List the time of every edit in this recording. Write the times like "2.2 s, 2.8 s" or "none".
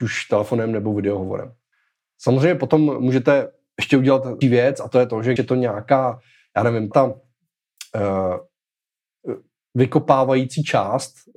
4.4 s, 5.4 s, 6.9 s